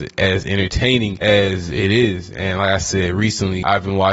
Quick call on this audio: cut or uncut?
uncut